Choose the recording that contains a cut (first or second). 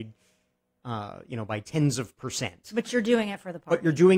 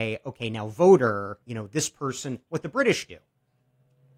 second